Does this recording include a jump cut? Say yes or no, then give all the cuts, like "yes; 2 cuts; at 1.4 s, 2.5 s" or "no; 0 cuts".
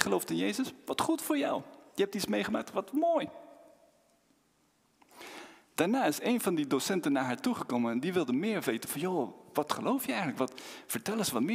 no; 0 cuts